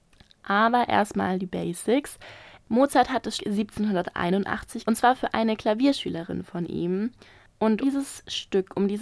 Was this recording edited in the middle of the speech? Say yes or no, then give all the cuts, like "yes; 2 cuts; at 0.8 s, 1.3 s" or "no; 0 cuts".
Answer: yes; 3 cuts; at 3.4 s, 4.8 s, 7.8 s